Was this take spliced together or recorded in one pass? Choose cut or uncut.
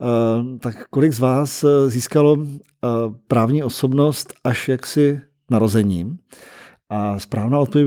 uncut